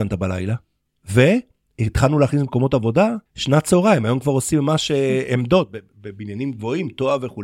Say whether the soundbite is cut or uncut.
cut